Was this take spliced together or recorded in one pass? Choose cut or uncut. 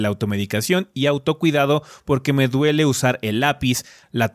uncut